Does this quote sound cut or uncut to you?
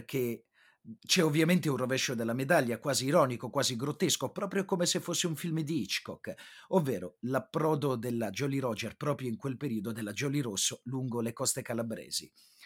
cut